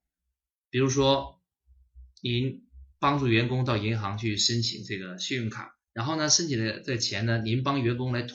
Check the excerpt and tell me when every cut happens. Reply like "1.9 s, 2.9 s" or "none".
2.9 s, 5.8 s